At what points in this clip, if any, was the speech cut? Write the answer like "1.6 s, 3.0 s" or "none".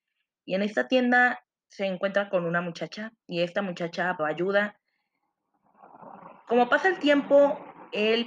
1.4 s, 3.2 s, 4.2 s